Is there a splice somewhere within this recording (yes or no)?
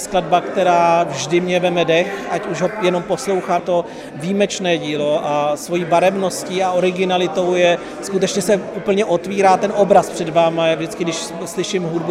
yes